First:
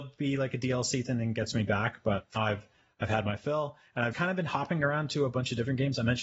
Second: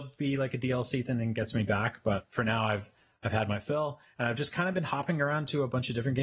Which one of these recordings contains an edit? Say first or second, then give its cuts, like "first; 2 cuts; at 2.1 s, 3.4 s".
first; 2 cuts; at 2.4 s, 4.1 s